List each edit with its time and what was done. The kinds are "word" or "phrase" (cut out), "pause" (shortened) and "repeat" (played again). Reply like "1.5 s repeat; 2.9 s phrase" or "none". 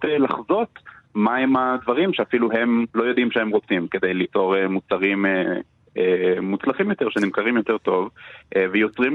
2.9 s pause